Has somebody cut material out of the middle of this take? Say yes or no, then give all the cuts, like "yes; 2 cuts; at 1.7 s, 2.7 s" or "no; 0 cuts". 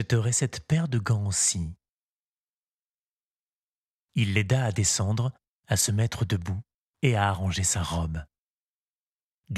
no; 0 cuts